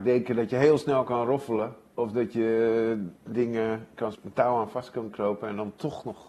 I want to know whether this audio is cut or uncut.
cut